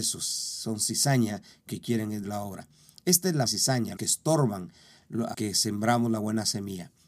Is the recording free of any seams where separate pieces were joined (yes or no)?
no